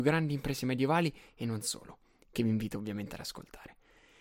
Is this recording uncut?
yes; 0 cuts

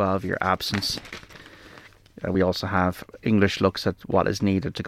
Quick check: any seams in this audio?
no; 0 cuts

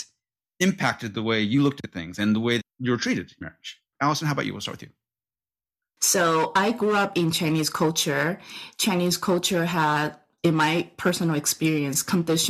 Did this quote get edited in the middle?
yes; 2 cuts; at 2.6 s, 3.4 s

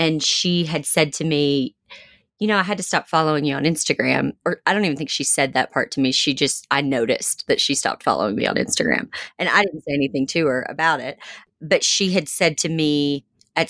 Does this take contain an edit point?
no; 0 cuts

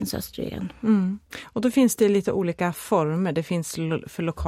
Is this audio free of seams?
yes; 0 cuts

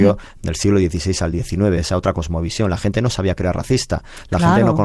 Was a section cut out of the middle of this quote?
no; 0 cuts

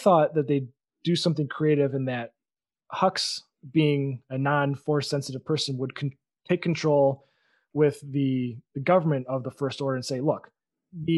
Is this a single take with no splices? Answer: yes; 0 cuts

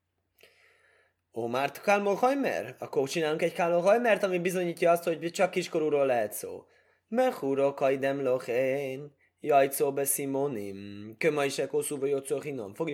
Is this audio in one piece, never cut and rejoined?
yes; 0 cuts

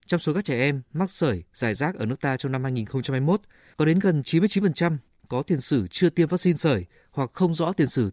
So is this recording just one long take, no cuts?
yes; 0 cuts

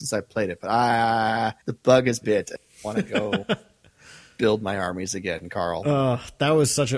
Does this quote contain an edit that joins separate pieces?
yes; 2 cuts; at 1.6 s, 2.2 s

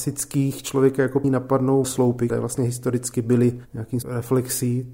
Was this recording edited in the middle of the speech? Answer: yes; 4 cuts; at 1.2 s, 1.8 s, 2.3 s, 4.0 s

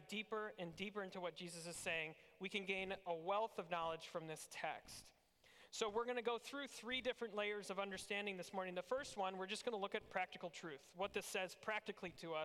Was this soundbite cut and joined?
no; 0 cuts

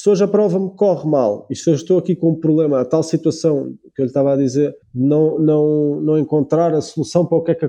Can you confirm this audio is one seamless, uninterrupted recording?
no; 1 cut; at 4.8 s

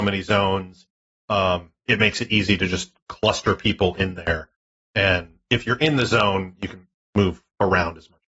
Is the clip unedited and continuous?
yes; 0 cuts

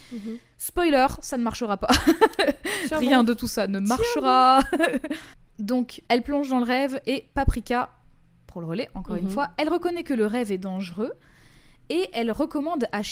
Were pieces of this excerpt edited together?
no; 0 cuts

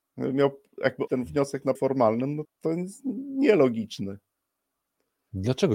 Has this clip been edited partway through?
yes; 3 cuts; at 1.1 s, 1.7 s, 2.4 s

